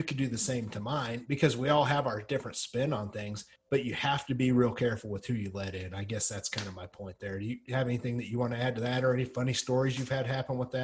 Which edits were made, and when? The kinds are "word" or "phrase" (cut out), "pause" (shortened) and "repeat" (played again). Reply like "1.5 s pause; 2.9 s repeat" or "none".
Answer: 3.6 s pause